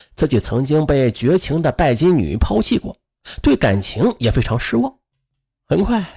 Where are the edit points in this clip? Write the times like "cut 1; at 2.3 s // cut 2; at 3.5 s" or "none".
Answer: none